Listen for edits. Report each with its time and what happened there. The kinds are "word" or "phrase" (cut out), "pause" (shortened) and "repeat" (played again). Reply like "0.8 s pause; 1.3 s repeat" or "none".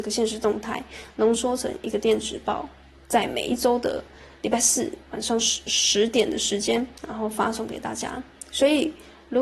7.0 s pause